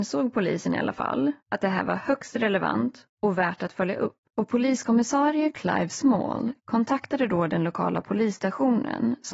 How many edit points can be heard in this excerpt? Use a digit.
1